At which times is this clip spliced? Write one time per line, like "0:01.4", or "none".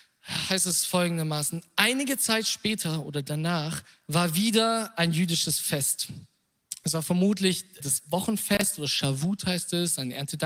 0:07.8